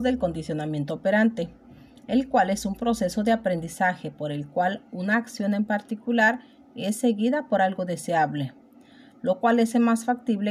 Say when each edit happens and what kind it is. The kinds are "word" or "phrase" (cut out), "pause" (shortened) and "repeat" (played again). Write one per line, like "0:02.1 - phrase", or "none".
none